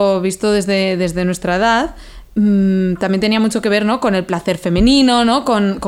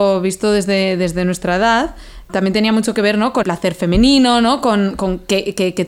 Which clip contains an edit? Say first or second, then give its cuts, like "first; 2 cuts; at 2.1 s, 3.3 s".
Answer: second; 2 cuts; at 2.3 s, 3.4 s